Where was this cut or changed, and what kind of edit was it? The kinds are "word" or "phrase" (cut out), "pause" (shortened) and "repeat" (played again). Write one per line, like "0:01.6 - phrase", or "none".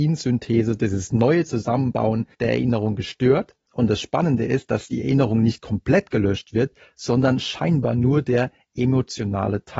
0:02.3 - pause